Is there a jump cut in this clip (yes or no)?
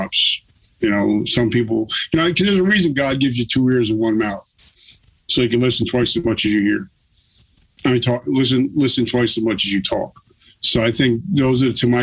no